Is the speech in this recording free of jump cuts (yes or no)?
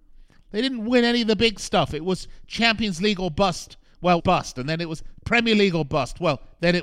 no